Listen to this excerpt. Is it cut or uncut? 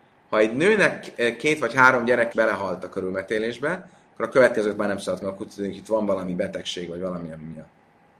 cut